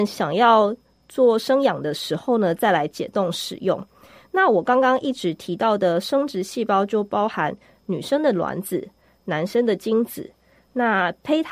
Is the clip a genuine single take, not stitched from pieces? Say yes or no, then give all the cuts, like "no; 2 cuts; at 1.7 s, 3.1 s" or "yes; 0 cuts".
yes; 0 cuts